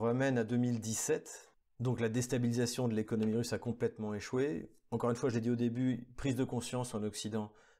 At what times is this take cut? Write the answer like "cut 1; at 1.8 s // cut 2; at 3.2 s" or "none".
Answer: none